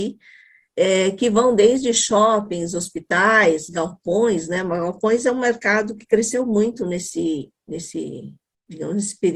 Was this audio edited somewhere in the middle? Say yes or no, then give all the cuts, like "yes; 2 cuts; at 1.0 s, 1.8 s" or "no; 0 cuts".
no; 0 cuts